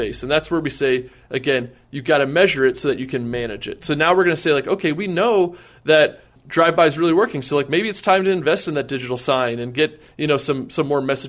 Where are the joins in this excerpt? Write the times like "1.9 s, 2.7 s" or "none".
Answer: none